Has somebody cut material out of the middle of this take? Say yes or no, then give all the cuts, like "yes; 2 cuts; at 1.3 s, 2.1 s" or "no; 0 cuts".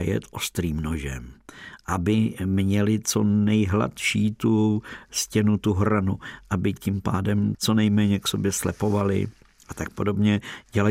yes; 1 cut; at 7.5 s